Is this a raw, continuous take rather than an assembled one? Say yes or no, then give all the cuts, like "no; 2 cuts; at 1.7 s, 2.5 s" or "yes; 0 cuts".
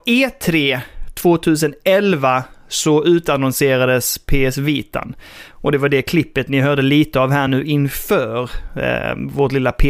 yes; 0 cuts